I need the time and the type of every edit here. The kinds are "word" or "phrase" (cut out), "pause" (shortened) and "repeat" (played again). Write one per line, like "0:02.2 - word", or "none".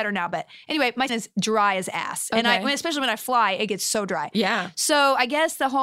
0:01.1 - word